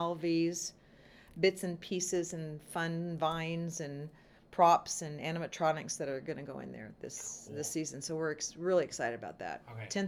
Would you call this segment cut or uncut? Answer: uncut